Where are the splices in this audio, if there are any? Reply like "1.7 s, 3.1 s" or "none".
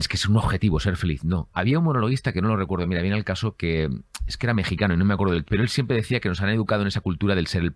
5.4 s